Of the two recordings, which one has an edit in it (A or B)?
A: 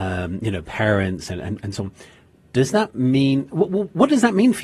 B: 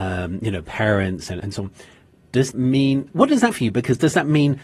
B